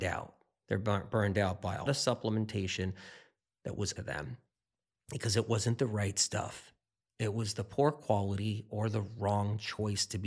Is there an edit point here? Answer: yes; 2 cuts; at 1.9 s, 4.0 s

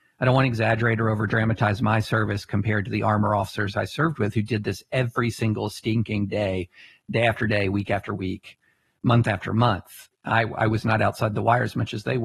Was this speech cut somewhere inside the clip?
yes; 2 cuts; at 3.7 s, 10.1 s

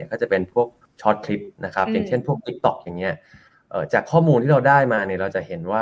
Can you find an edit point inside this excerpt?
yes; 1 cut; at 1.6 s

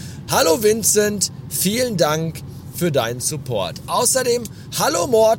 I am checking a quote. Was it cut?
no; 0 cuts

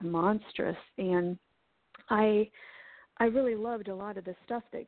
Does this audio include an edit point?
no; 0 cuts

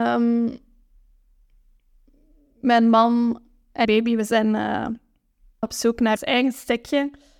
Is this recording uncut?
no; 3 cuts; at 3.8 s, 5.6 s, 6.2 s

